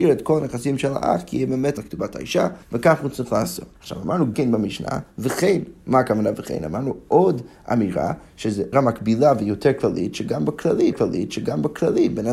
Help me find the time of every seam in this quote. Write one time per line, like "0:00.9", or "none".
0:01.8
0:02.6
0:03.8
0:04.3
0:08.7
0:10.9